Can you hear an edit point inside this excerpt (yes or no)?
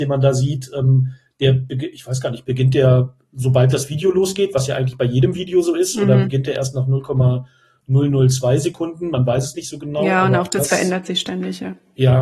no